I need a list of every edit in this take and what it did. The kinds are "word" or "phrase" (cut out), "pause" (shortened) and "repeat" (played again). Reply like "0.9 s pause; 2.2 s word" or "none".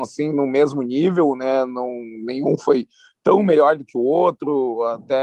none